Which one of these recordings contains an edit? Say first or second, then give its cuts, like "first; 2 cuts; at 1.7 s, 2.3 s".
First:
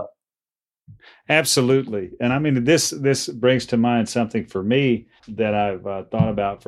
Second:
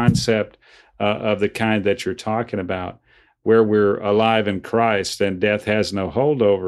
first; 1 cut; at 5.2 s